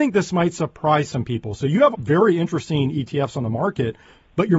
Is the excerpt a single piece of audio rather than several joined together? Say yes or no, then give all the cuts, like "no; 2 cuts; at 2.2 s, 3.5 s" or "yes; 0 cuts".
no; 1 cut; at 1.9 s